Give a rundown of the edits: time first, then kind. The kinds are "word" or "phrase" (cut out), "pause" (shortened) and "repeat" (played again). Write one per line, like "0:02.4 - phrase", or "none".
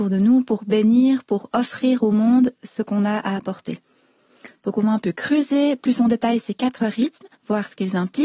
0:07.3 - pause